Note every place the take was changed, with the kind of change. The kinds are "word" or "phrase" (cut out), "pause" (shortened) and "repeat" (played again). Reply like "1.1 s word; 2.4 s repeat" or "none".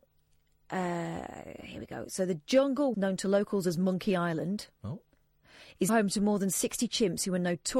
2.9 s word; 5.9 s word